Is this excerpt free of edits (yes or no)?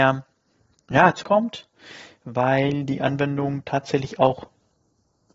no